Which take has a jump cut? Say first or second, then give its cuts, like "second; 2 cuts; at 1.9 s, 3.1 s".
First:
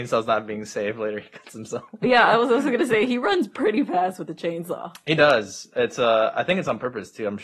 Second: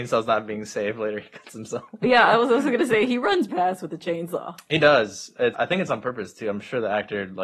second; 2 cuts; at 3.5 s, 5.5 s